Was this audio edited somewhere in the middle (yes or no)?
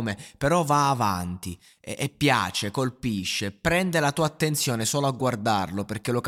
no